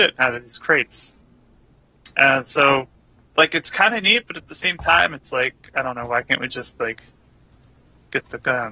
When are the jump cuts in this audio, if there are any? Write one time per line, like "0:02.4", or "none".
none